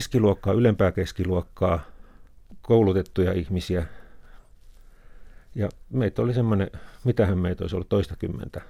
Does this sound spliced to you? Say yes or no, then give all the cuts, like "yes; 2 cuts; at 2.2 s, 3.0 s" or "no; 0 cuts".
no; 0 cuts